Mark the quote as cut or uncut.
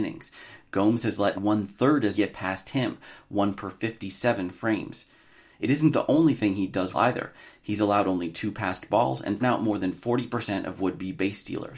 cut